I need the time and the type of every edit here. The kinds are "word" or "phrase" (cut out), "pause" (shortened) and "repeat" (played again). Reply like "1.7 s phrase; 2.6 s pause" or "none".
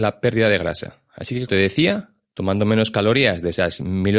1.5 s word